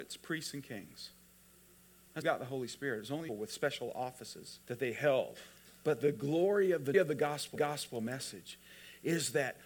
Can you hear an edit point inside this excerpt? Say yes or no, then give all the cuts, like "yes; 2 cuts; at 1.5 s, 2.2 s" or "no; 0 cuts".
yes; 6 cuts; at 2.2 s, 3.3 s, 4.6 s, 5.6 s, 6.9 s, 7.5 s